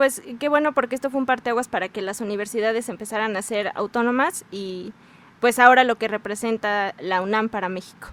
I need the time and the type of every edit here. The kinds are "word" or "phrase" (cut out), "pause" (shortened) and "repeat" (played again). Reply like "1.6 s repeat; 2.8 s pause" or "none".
none